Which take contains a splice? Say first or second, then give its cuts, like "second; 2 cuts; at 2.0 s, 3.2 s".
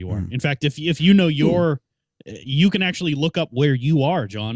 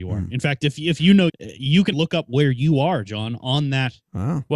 second; 2 cuts; at 1.3 s, 1.9 s